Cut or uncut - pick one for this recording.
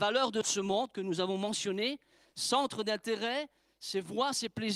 uncut